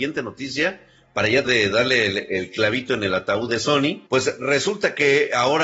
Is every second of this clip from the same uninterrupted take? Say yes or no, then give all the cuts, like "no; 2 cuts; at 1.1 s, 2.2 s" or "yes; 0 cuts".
no; 2 cuts; at 1.5 s, 4.1 s